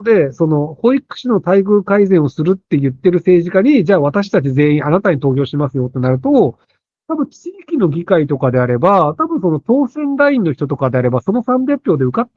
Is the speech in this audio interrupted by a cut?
no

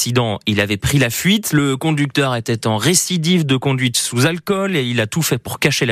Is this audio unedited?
yes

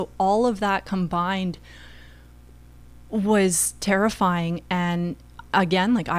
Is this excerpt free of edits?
yes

